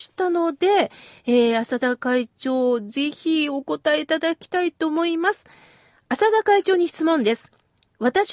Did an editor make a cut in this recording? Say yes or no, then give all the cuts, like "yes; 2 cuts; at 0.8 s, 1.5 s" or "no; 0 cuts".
no; 0 cuts